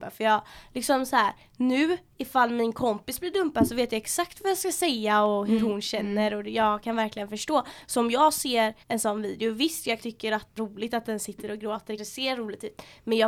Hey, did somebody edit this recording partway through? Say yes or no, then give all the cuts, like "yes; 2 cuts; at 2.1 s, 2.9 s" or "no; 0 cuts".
yes; 4 cuts; at 8.8 s, 10.0 s, 10.6 s, 12.0 s